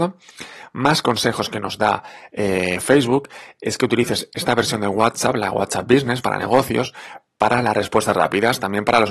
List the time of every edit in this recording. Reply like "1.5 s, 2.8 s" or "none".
none